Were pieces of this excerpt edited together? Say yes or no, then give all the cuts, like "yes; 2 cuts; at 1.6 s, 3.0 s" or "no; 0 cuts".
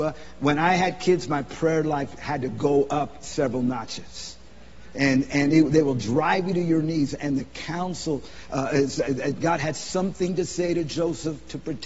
no; 0 cuts